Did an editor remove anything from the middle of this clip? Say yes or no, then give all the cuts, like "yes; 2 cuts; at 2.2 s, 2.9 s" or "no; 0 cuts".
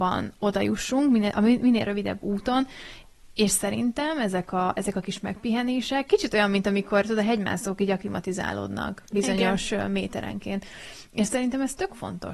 no; 0 cuts